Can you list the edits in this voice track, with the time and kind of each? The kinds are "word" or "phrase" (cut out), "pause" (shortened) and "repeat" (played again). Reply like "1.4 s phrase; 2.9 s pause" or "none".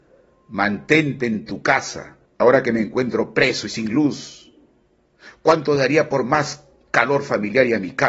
2.2 s pause